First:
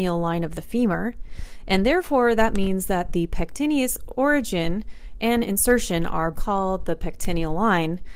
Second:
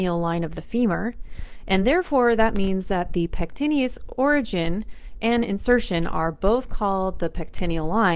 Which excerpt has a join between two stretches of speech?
first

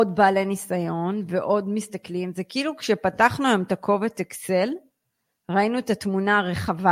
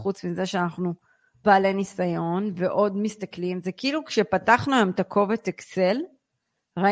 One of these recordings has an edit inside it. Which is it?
second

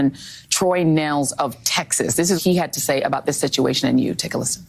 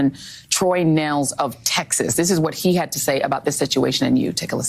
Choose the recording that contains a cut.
first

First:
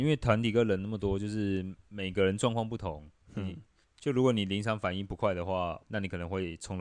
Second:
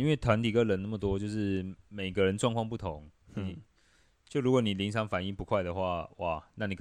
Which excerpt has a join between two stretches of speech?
first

